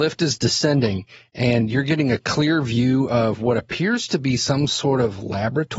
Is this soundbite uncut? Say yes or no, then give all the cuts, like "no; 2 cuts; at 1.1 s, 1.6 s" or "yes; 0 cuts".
yes; 0 cuts